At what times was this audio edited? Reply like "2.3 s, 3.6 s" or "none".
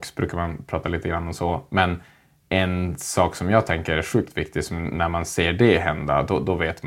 2.4 s